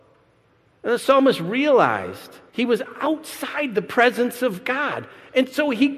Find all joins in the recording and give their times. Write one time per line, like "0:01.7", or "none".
0:02.5